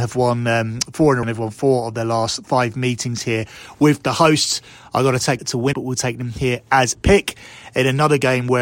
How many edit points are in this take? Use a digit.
4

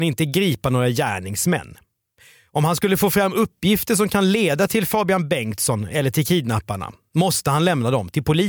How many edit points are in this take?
0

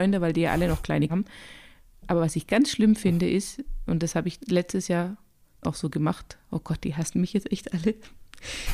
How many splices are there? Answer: 3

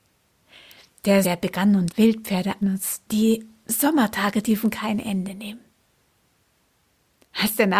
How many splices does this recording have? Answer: 5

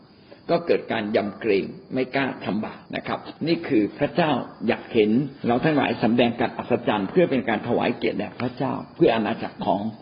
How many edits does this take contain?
3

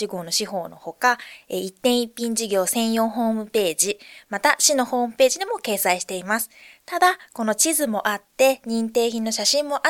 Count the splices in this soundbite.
0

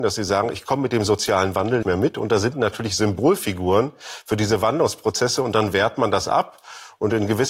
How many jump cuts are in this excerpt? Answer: 2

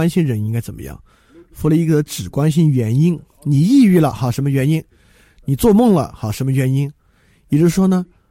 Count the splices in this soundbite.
0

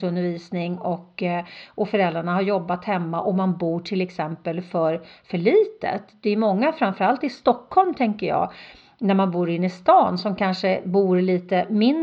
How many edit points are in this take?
0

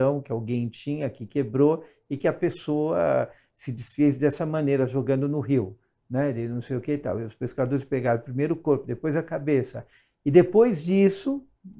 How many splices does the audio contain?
0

